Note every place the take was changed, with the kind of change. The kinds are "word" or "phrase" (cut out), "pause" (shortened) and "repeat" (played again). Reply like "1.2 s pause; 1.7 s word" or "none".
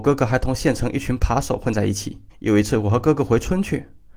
2.3 s pause